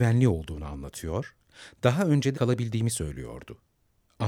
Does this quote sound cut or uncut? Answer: cut